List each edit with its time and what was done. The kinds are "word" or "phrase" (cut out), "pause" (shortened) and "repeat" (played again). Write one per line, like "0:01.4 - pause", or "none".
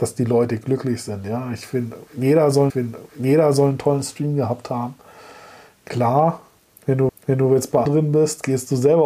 0:02.7 - repeat
0:07.1 - repeat
0:07.9 - word